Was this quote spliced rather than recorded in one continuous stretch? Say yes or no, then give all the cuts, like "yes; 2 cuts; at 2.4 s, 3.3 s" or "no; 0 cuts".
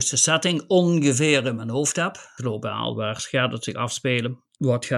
no; 0 cuts